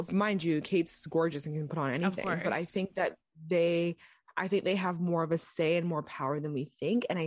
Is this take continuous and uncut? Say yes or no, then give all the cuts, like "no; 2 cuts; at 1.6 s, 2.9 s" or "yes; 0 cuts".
yes; 0 cuts